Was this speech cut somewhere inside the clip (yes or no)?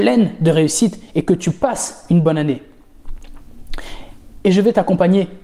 no